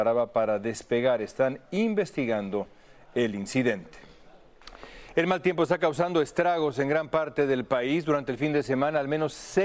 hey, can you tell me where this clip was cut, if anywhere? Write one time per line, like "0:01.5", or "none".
none